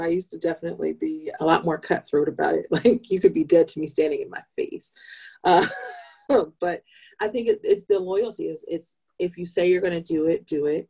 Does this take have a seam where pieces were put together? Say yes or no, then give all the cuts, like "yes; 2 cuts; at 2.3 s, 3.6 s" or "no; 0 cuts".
yes; 1 cut; at 1.4 s